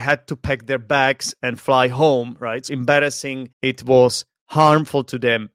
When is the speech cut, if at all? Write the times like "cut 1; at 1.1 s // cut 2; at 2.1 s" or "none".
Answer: cut 1; at 2.7 s // cut 2; at 3.5 s